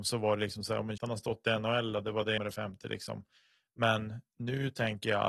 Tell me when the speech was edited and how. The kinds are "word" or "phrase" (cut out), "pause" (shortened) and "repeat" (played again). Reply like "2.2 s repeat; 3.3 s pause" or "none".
1.0 s word; 2.4 s word